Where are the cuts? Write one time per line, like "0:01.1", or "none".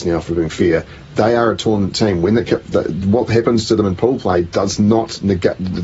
none